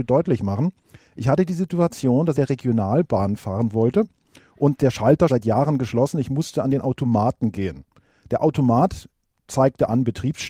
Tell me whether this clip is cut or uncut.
cut